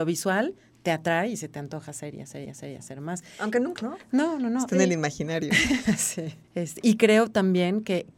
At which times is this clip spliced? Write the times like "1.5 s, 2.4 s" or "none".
2.4 s, 3.8 s, 6.4 s